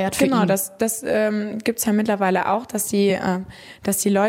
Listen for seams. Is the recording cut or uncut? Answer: uncut